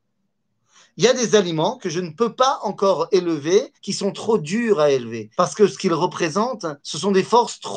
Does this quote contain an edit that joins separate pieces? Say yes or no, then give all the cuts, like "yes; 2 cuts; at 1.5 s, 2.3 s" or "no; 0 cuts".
yes; 3 cuts; at 3.7 s, 5.3 s, 6.8 s